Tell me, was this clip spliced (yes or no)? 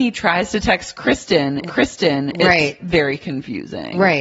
yes